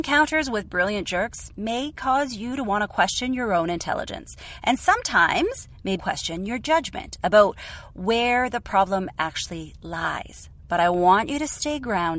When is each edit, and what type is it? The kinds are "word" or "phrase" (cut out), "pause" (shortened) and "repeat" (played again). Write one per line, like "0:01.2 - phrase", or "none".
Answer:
0:06.0 - word